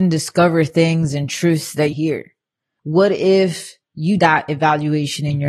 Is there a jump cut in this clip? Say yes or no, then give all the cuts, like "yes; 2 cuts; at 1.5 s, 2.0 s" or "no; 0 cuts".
yes; 2 cuts; at 1.9 s, 4.2 s